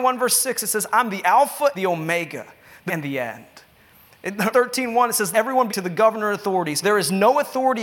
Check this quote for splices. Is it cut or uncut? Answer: cut